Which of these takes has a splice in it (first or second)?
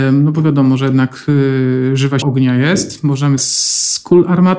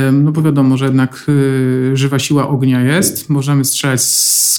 first